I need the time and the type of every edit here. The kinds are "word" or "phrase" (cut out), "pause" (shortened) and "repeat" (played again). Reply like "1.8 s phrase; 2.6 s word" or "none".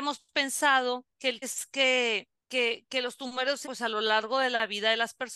1.1 s pause; 1.4 s word; 2.4 s pause; 3.6 s word

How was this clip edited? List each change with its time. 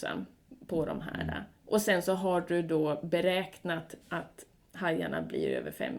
4.0 s pause

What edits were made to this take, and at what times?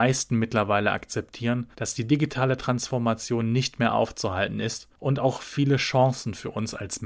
1.7 s pause; 4.9 s pause

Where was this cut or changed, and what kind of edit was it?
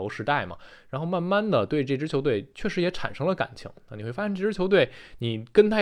none

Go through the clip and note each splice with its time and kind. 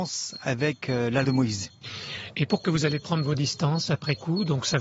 1.2 s word; 2.6 s word

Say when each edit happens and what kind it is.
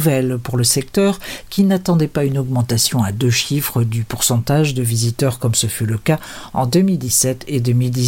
none

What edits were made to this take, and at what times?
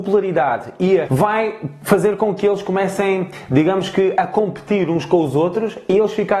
1.1 s word

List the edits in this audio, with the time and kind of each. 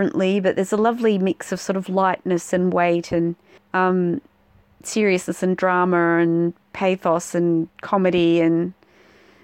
3.6 s pause; 7.7 s pause

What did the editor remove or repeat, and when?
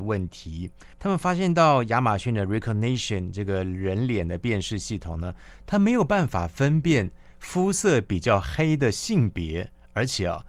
0.9 s pause

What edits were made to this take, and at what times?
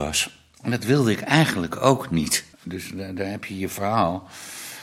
2.5 s pause

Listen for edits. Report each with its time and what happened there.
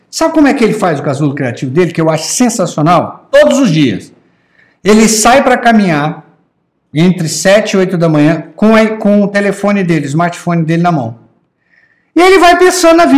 none

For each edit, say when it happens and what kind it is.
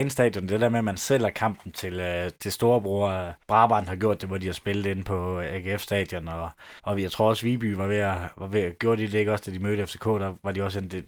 3.4 s pause; 6.8 s pause

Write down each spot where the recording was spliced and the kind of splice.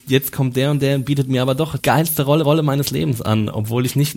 1.8 s word; 2.4 s repeat

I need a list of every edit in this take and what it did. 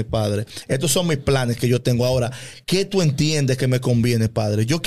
2.6 s pause

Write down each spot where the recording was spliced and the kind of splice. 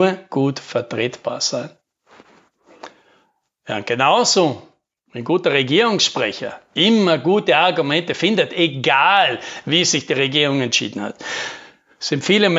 none

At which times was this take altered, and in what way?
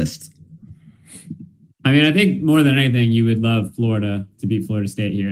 none

